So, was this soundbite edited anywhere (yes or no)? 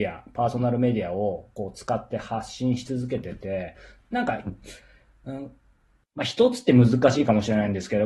no